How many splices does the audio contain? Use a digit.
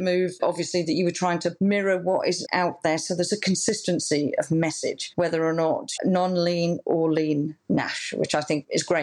2